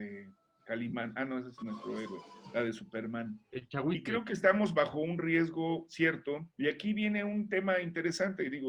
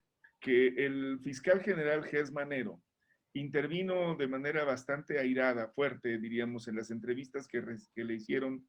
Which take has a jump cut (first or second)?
first